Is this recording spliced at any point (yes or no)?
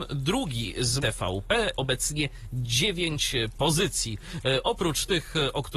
yes